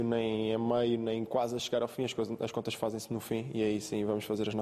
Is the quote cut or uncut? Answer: uncut